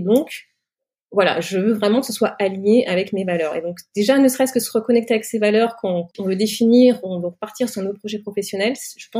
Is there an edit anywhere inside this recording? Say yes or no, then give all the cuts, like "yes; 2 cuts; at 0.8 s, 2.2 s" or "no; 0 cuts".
no; 0 cuts